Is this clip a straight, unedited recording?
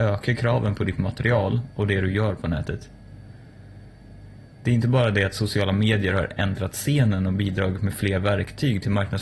yes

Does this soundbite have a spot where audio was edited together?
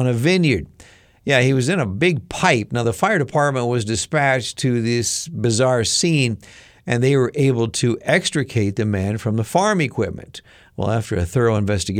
no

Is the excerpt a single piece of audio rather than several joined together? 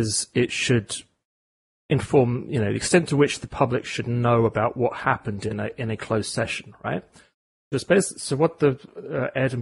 yes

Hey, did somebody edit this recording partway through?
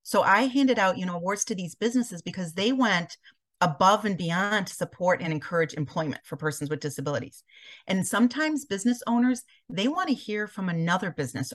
no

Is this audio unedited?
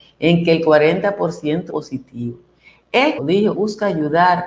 no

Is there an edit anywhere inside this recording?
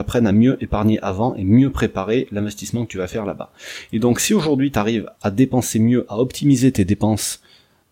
no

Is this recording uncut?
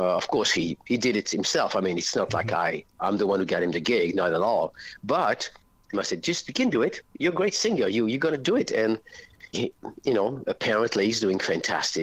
no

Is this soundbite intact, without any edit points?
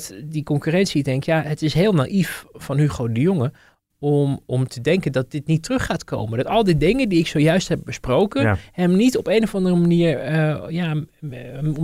yes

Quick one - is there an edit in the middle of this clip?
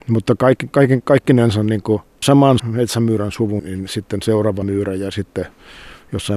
yes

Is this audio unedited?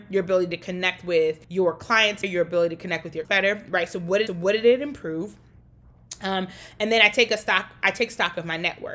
no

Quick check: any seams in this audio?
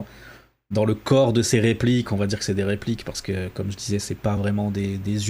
no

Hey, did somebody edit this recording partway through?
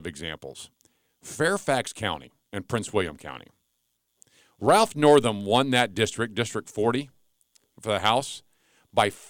no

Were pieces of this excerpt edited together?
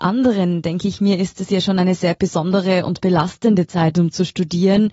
no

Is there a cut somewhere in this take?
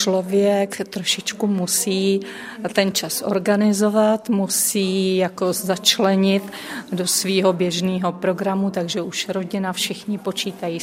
no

